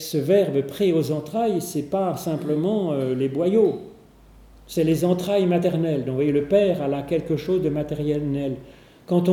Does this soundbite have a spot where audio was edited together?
no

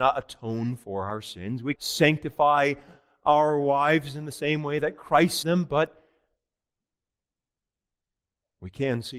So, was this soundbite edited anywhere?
yes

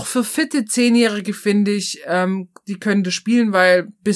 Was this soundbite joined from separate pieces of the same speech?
no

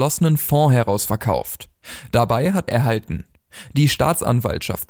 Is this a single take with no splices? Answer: no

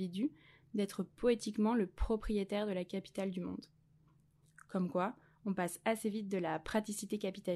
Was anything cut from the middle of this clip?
no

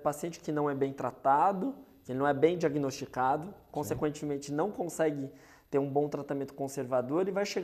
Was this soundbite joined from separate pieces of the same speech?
no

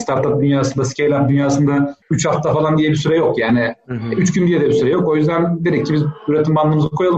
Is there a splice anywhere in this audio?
yes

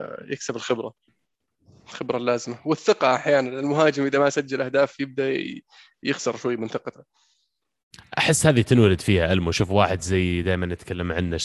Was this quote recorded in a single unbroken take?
yes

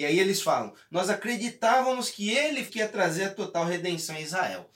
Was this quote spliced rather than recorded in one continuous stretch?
yes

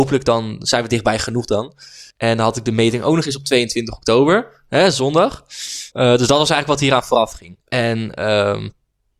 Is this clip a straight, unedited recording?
no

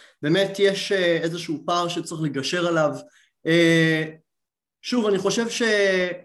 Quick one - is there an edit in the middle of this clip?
no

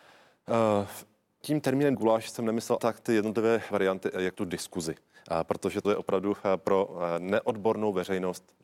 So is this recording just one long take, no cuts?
no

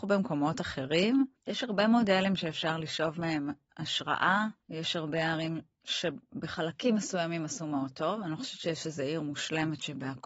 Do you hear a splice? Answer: yes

